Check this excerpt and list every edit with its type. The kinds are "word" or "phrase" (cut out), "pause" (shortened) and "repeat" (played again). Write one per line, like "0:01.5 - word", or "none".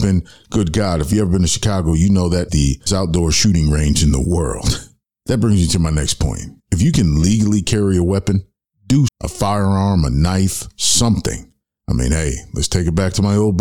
0:02.5 - word
0:02.9 - word
0:06.6 - pause
0:09.1 - word